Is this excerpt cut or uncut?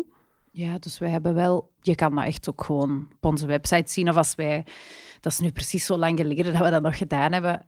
uncut